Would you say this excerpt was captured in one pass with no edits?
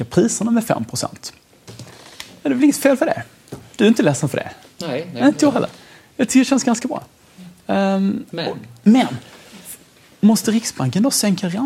yes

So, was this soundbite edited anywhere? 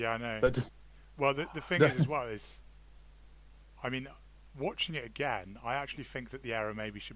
no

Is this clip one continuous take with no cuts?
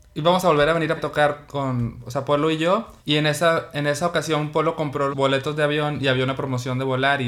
no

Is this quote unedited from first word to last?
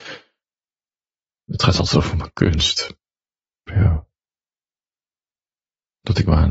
yes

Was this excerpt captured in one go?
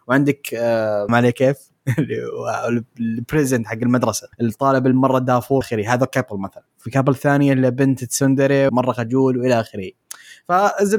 no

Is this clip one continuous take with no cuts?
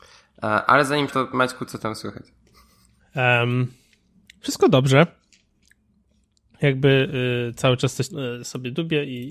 no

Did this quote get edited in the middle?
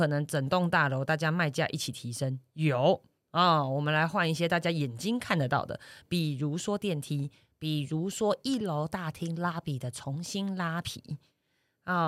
no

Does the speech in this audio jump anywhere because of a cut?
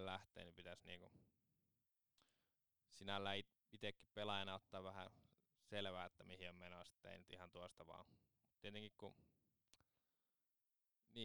no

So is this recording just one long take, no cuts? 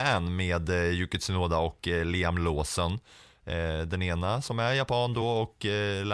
yes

